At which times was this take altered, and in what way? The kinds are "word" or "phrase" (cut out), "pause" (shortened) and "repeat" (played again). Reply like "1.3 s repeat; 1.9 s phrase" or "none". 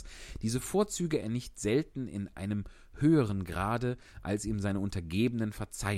1.2 s word